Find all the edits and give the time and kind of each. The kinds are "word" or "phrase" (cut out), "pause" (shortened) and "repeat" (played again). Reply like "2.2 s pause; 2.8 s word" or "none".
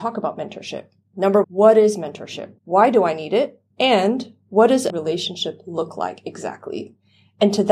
1.4 s word; 2.6 s pause; 3.7 s pause; 4.9 s word